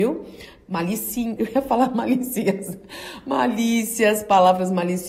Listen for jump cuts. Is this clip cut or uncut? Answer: cut